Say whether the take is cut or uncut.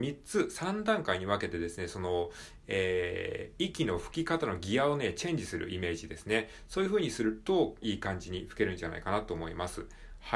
cut